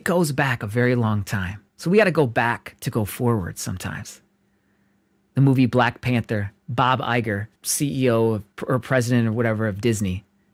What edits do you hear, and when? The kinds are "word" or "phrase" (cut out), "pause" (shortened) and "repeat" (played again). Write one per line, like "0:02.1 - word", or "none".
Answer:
0:01.7 - pause
0:06.6 - pause
0:07.6 - pause
0:08.5 - pause